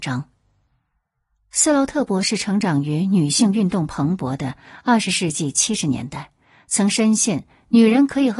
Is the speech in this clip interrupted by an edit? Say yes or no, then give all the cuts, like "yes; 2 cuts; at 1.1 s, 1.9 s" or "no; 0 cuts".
no; 0 cuts